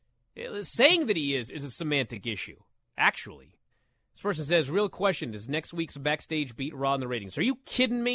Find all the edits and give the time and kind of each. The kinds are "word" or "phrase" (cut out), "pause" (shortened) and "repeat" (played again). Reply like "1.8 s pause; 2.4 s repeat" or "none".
3.7 s pause